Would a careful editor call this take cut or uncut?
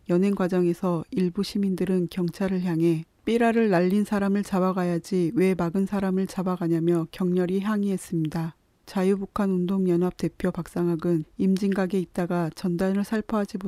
uncut